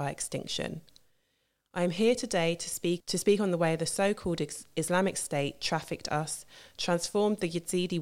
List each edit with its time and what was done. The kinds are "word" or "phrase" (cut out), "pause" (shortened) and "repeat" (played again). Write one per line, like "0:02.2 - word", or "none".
0:03.0 - phrase